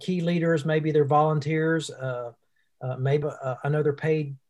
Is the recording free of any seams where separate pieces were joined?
no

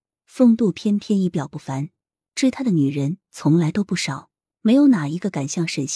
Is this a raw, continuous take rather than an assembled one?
yes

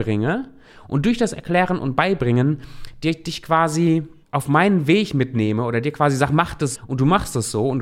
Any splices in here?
yes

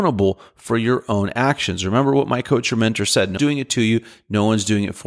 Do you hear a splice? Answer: yes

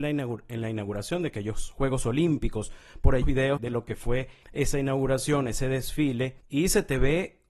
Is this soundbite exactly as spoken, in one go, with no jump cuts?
no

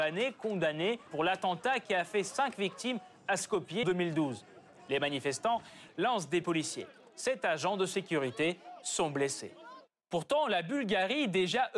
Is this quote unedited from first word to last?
no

